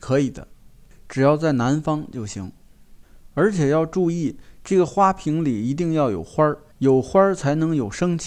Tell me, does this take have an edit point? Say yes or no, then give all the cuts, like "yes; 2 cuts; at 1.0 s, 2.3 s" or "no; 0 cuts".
yes; 1 cut; at 6.7 s